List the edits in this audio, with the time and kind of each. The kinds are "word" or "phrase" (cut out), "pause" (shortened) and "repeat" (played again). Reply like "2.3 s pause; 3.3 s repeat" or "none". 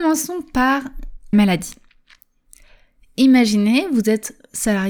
1.3 s word